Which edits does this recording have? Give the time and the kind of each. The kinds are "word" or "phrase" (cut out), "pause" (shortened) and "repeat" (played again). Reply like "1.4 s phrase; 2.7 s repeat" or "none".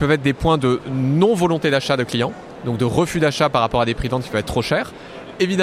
none